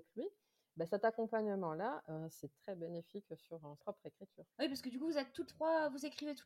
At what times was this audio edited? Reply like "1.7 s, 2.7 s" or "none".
2.5 s, 3.8 s, 4.5 s, 5.5 s